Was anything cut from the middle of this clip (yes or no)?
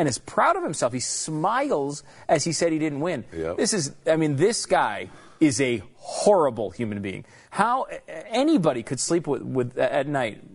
no